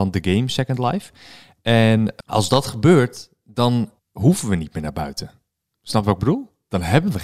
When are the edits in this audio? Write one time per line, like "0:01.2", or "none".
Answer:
0:02.2
0:04.0